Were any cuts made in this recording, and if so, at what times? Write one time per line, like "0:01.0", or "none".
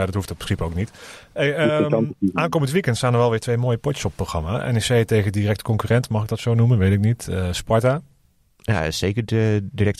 none